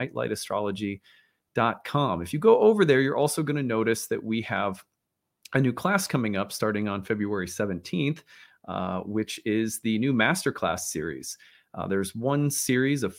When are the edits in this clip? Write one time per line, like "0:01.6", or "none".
none